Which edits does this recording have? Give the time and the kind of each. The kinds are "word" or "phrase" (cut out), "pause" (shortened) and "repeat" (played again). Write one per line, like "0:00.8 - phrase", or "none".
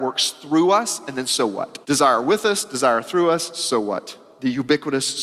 0:01.8 - pause